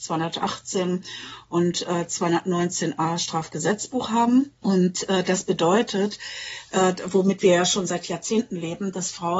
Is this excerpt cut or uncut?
uncut